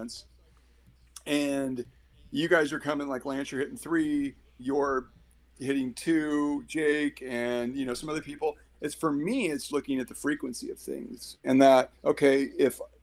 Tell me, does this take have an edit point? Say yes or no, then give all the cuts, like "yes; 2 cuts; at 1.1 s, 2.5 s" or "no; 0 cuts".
yes; 3 cuts; at 4.6 s, 9.7 s, 11.9 s